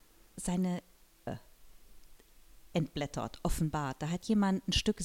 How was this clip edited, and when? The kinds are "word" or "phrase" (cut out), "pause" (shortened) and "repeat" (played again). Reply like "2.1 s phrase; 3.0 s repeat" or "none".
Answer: 1.3 s word